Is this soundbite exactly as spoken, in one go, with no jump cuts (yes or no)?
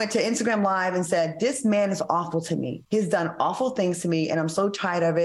no